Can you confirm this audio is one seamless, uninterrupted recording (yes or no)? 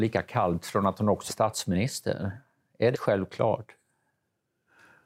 no